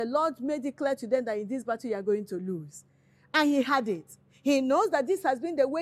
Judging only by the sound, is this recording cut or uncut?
uncut